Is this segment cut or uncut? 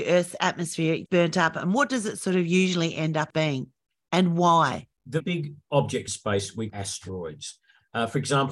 cut